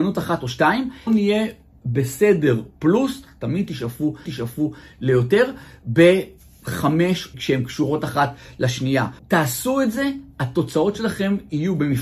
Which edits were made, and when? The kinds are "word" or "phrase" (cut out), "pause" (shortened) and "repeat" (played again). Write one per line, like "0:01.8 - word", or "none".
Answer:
0:01.1 - phrase
0:04.3 - repeat
0:07.3 - phrase
0:09.2 - pause

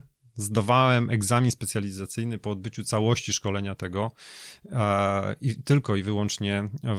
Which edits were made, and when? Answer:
none

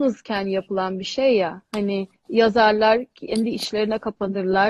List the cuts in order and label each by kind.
0:02.2 - pause

